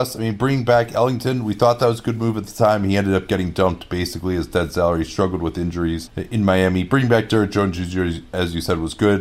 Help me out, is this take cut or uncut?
uncut